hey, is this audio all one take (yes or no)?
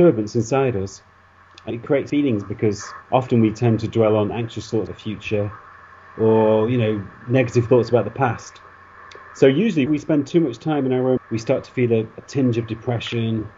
no